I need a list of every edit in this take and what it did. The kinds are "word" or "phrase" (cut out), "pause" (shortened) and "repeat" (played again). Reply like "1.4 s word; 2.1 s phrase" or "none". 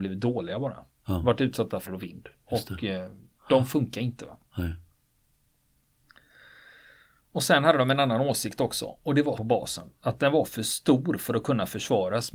1.9 s word; 9.4 s word